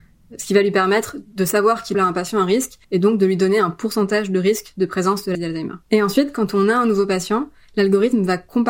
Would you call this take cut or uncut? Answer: cut